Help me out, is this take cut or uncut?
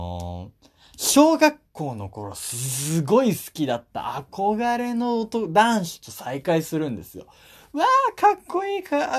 uncut